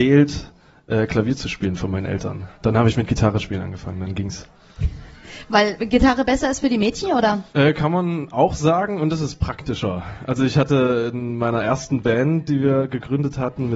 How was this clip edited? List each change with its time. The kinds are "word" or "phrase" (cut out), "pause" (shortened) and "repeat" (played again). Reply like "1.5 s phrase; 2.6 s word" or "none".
2.5 s pause; 7.5 s pause

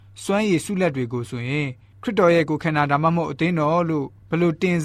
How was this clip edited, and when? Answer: none

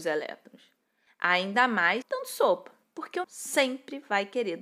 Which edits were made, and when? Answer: 2.0 s phrase; 2.8 s pause; 3.2 s word

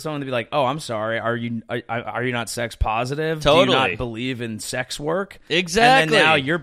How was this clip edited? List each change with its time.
none

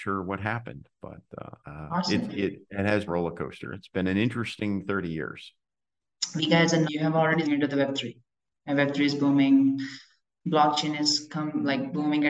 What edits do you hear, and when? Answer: 1.6 s pause; 3.1 s phrase; 6.8 s word; 7.4 s phrase

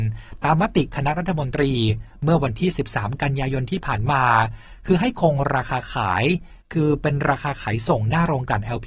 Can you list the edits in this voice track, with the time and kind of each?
6.6 s pause

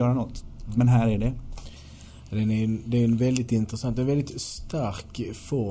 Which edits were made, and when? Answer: none

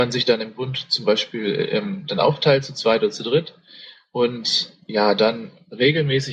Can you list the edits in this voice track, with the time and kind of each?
none

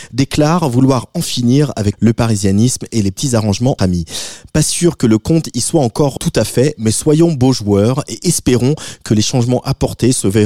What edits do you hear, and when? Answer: 1.9 s word; 3.8 s word; 6.2 s word

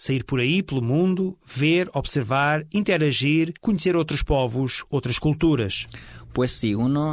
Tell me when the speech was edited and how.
3.6 s pause

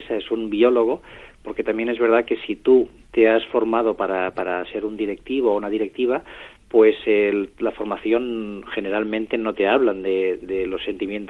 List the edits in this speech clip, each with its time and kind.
none

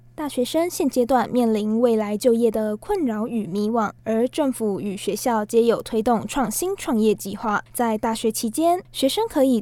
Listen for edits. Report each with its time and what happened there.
4.0 s pause; 7.7 s pause

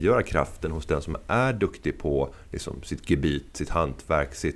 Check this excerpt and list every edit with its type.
none

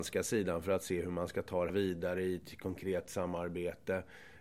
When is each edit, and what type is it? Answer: 1.7 s phrase

